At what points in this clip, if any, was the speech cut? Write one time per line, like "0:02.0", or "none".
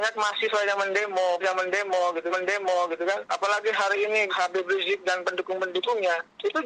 0:01.4
0:02.3
0:04.3